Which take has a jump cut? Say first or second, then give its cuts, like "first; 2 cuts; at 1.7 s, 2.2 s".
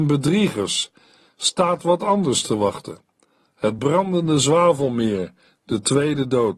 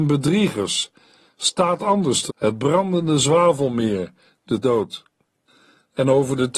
second; 3 cuts; at 1.8 s, 2.3 s, 4.6 s